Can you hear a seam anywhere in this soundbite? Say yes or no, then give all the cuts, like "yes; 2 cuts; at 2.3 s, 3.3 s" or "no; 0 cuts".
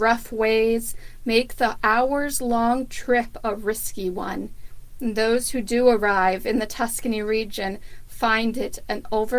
no; 0 cuts